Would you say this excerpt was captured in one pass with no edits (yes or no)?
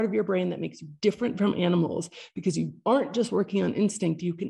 yes